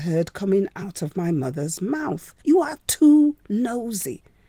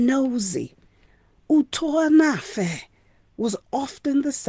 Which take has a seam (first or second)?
first